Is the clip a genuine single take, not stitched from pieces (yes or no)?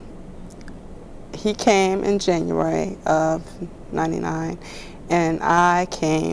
yes